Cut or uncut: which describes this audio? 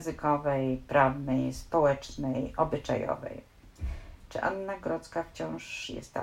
uncut